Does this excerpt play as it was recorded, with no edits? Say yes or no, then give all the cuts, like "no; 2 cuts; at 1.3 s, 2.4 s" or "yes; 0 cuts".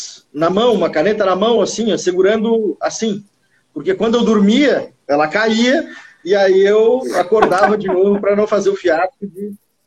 yes; 0 cuts